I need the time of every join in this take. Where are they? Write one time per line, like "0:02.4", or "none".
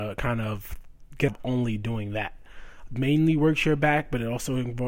0:01.3
0:02.9